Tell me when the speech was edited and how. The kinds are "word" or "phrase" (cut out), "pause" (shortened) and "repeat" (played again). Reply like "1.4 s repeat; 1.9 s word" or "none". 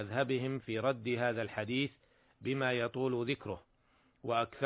none